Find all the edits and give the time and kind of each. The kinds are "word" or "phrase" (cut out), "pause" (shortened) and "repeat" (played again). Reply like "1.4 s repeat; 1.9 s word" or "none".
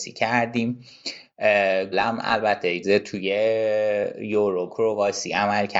1.9 s word; 2.8 s word; 4.7 s word

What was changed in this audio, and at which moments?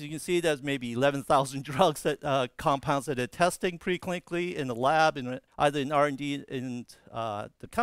5.5 s pause

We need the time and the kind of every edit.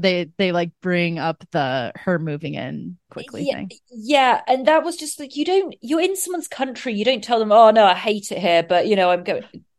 3.1 s word

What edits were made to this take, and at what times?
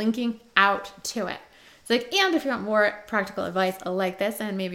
none

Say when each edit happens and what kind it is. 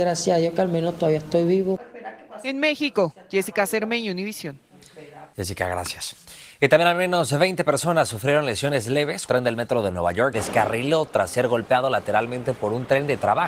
9.3 s phrase; 10.3 s word

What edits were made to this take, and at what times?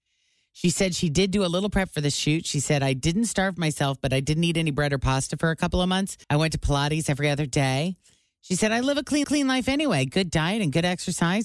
6.2 s pause; 9.2 s repeat

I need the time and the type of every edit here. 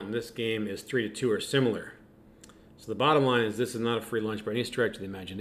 none

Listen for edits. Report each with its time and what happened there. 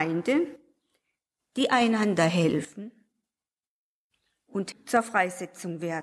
4.7 s word

